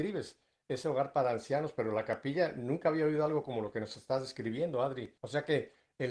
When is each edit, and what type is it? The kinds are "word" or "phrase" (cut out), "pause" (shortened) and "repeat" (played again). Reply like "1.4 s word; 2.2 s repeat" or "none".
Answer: 5.2 s pause

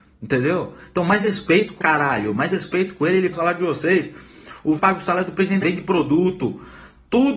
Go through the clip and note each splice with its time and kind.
1.8 s phrase; 3.3 s word; 4.8 s word; 5.6 s phrase

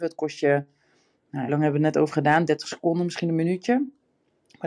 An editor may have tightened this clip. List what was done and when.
1.5 s word

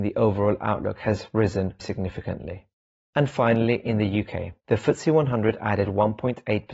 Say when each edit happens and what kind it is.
1.8 s word; 4.6 s pause

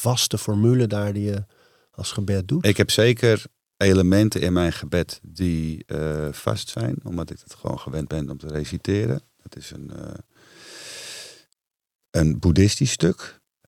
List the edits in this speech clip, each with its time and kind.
none

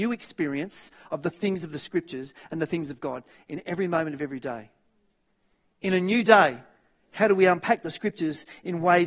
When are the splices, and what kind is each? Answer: none

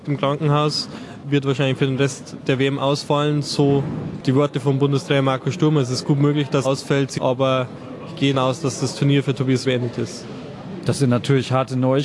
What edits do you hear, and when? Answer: 6.6 s word; 7.2 s phrase; 8.3 s word; 9.6 s word

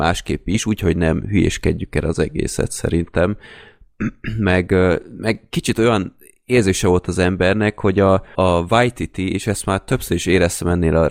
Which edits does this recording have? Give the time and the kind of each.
8.3 s word

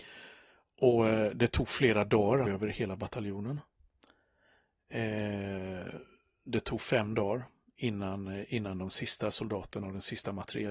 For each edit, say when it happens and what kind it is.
2.5 s phrase

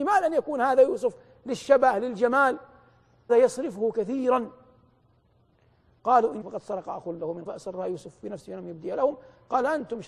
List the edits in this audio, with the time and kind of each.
3.3 s word; 6.4 s word; 7.5 s word

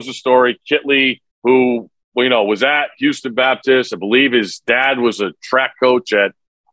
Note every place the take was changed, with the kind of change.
1.3 s pause

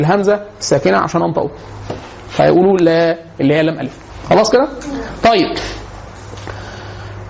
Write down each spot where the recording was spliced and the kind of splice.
none

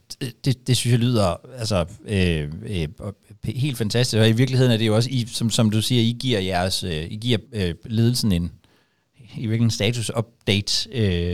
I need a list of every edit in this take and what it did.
7.5 s pause

